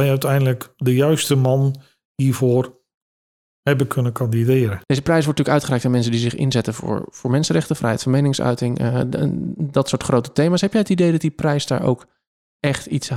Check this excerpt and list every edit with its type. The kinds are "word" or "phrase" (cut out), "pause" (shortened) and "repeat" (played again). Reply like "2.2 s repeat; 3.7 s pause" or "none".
none